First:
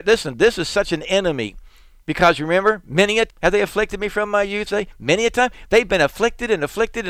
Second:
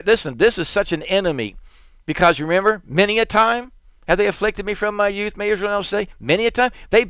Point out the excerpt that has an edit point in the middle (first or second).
first